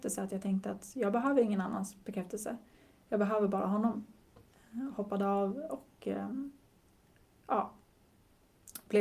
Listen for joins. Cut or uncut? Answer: uncut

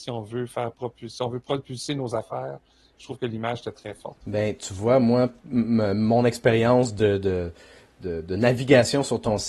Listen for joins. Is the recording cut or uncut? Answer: uncut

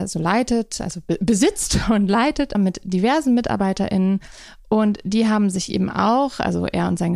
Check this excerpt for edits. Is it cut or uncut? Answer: cut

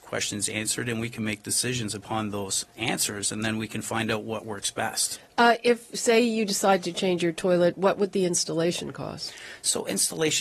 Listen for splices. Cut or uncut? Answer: cut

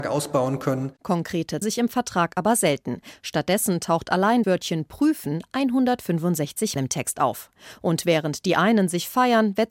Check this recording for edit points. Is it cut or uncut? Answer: cut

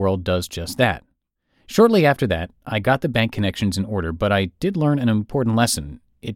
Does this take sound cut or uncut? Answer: uncut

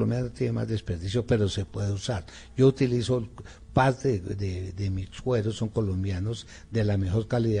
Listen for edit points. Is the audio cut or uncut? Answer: uncut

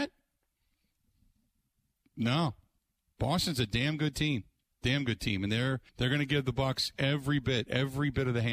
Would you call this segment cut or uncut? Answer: cut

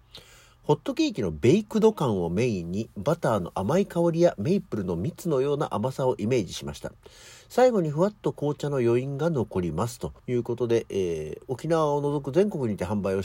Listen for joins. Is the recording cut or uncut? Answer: cut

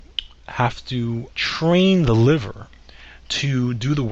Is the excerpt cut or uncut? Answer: cut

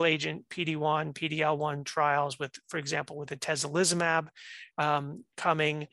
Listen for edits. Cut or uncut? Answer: uncut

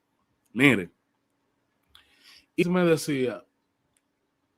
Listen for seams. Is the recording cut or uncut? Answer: cut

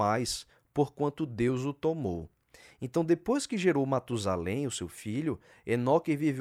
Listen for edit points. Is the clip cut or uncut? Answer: uncut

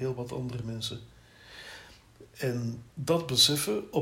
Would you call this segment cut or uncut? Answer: cut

